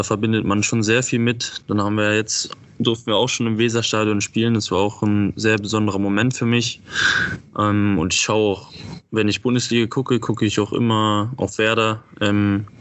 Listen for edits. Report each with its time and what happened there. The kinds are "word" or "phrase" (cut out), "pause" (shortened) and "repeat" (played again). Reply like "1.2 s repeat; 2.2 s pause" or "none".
none